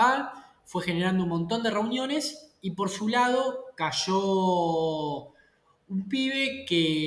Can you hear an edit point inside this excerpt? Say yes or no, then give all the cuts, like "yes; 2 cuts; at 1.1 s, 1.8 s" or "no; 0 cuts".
no; 0 cuts